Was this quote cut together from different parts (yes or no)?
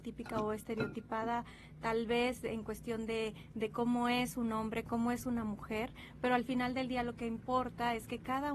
no